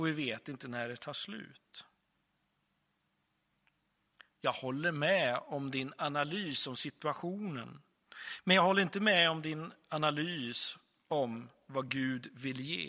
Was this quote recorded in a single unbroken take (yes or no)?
yes